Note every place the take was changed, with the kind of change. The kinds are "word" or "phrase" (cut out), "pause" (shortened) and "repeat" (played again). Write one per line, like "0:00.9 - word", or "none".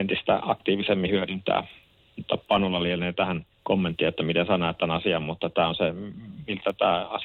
0:02.4 - pause
0:03.5 - pause